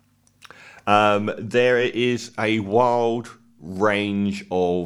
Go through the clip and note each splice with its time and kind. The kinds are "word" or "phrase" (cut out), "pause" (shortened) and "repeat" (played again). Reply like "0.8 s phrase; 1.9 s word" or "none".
none